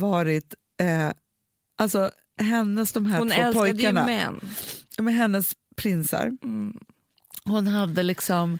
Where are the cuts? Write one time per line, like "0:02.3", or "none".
none